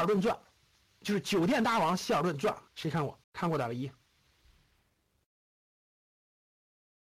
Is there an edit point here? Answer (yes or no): yes